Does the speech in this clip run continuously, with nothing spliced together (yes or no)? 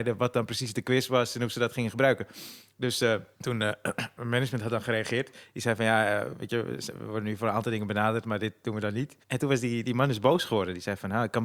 no